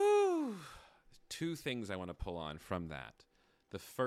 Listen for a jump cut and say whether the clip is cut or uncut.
uncut